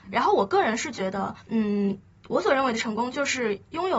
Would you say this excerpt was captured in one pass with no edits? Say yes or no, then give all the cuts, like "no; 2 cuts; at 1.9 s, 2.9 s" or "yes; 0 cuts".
no; 1 cut; at 1.4 s